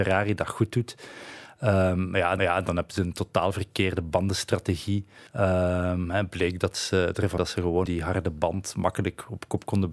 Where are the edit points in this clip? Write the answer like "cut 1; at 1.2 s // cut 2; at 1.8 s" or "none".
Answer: cut 1; at 2.4 s // cut 2; at 5.3 s // cut 3; at 7.4 s // cut 4; at 7.9 s